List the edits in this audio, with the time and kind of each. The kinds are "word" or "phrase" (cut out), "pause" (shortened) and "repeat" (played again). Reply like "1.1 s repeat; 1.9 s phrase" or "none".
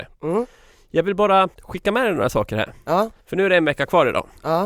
1.5 s pause; 3.2 s pause

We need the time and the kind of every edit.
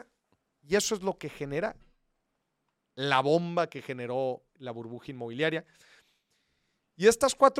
4.5 s word

